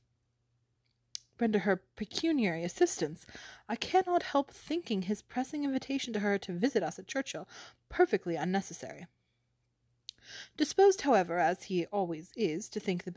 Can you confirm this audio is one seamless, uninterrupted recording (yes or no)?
yes